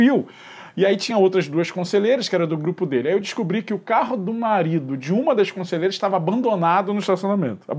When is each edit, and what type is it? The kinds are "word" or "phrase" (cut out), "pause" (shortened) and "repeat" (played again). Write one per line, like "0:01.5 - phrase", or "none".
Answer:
none